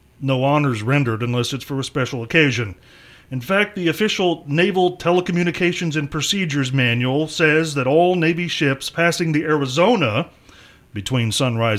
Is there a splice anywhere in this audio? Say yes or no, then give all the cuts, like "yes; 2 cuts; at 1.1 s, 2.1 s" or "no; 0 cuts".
no; 0 cuts